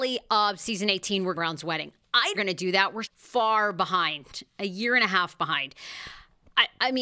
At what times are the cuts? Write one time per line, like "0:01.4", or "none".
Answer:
0:01.4
0:02.3
0:03.1